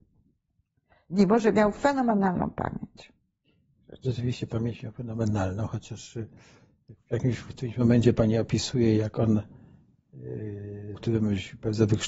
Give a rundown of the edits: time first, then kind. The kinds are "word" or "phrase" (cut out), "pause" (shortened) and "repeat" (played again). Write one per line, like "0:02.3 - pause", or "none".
0:10.9 - word